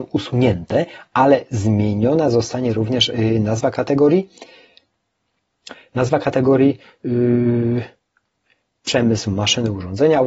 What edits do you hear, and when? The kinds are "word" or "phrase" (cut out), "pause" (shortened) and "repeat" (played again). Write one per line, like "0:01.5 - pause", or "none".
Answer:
none